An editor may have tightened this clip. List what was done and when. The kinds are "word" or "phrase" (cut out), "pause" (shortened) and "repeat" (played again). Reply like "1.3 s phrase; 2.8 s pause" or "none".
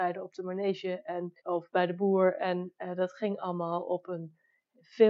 1.4 s pause